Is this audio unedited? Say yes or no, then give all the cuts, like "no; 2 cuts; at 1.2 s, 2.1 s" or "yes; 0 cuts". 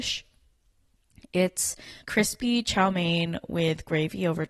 no; 1 cut; at 2.0 s